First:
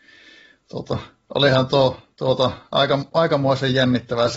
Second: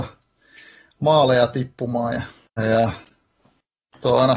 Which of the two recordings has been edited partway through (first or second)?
second